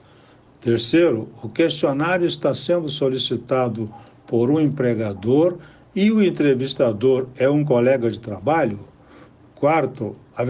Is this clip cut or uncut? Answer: uncut